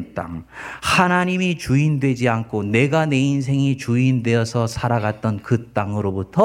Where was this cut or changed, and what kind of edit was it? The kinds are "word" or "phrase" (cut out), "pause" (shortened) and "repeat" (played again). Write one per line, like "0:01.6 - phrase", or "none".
none

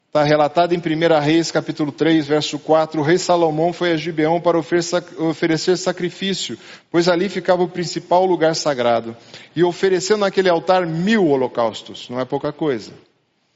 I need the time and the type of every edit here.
none

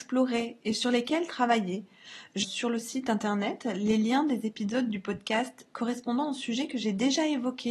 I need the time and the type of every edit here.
0:02.4 - phrase

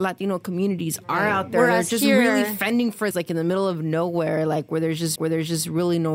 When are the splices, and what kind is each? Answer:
0:03.1 - word
0:05.2 - repeat

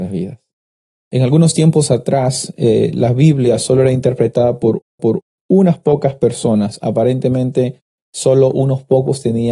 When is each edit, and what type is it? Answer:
0:05.0 - repeat

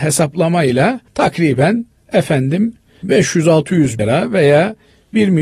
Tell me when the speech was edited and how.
0:01.1 - pause
0:04.0 - word

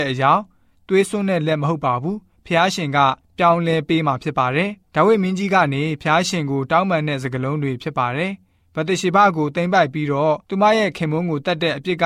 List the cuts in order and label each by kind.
0:04.9 - pause
0:10.4 - pause

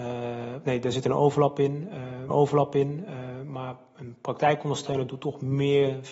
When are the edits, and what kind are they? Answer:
0:02.3 - repeat

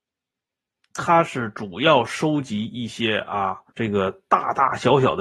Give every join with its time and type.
0:03.7 - pause

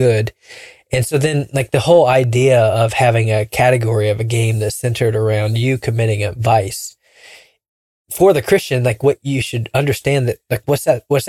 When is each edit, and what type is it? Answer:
none

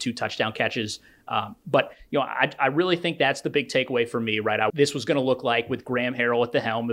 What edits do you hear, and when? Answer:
0:04.7 - phrase

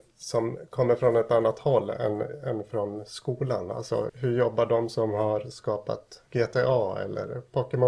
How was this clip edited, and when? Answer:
0:04.1 - word
0:06.3 - pause

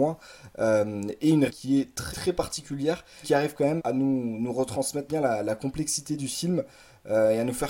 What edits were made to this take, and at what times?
0:01.5 - word
0:02.1 - word
0:03.2 - word
0:03.8 - word
0:05.1 - word

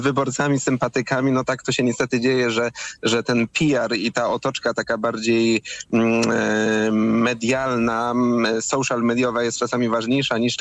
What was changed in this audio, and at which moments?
none

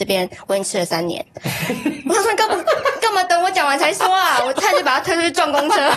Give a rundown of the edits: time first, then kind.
none

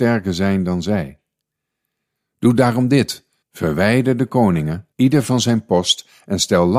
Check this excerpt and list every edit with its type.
0:03.4 - pause
0:04.9 - pause

